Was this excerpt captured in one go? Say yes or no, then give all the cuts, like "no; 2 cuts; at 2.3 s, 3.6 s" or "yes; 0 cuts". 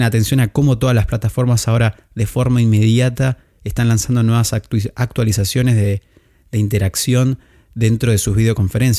yes; 0 cuts